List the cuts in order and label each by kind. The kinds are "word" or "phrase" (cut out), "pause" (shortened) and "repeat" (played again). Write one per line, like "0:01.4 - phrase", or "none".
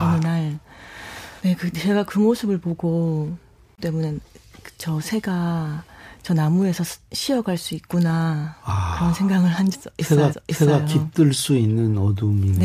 0:01.4 - pause
0:03.8 - phrase
0:09.7 - word
0:10.3 - repeat

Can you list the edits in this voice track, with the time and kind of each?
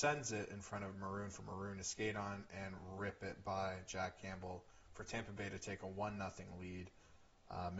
none

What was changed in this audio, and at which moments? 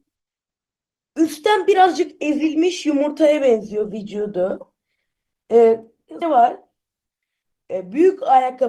0:06.2 - phrase

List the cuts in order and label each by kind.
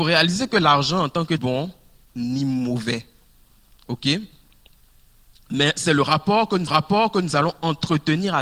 0:01.4 - phrase
0:06.7 - repeat

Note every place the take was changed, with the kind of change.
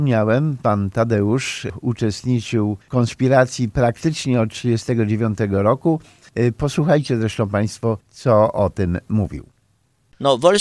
0:02.8 - pause
0:08.0 - pause

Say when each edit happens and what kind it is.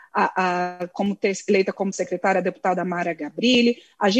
0:01.9 - word

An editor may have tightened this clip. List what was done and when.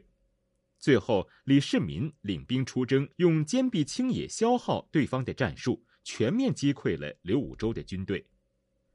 0:03.1 - pause

